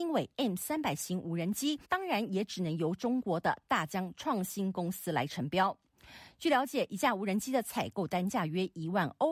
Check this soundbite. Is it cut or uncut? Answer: cut